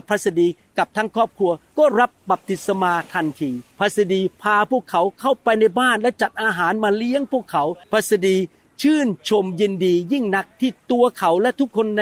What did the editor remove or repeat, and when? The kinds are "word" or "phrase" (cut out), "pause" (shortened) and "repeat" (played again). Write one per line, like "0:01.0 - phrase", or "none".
0:03.7 - pause
0:07.8 - pause